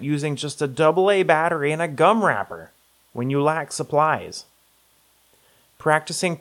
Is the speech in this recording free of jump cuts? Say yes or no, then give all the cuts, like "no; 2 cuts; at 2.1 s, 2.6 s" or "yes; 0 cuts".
yes; 0 cuts